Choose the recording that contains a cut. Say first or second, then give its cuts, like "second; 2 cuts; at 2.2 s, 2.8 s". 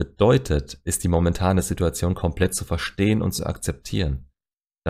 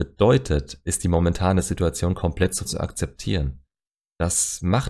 second; 1 cut; at 2.6 s